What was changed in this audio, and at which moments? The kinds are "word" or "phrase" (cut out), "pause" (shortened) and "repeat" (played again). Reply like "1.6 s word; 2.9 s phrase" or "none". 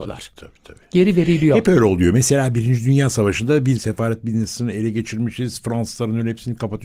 3.8 s phrase